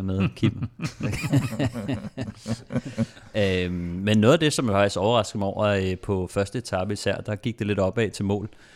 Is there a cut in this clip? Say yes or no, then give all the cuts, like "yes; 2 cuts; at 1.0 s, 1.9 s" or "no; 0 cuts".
no; 0 cuts